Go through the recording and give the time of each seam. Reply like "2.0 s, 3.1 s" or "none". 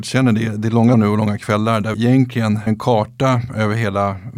0.9 s, 1.9 s, 2.7 s